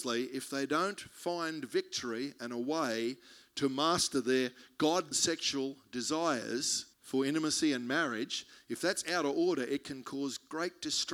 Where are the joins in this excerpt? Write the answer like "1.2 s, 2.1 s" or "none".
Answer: 5.1 s, 6.9 s